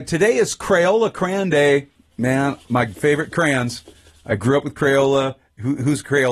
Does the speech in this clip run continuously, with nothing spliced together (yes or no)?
yes